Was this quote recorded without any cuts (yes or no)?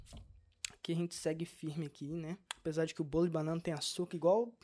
no